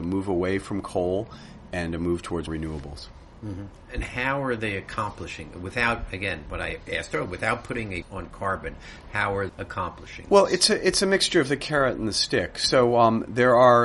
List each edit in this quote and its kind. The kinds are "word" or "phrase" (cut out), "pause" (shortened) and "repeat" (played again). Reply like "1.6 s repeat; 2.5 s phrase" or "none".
2.5 s word; 8.0 s word; 9.5 s word